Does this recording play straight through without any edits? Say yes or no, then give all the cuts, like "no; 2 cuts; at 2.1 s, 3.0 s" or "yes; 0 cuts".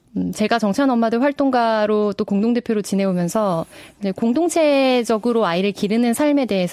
yes; 0 cuts